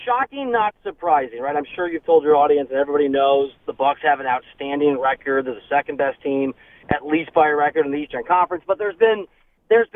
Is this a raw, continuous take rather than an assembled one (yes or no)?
yes